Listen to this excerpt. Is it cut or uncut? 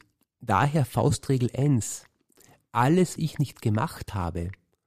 cut